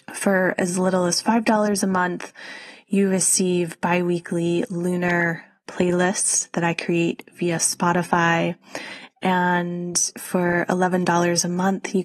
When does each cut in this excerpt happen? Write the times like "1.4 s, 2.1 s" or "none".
none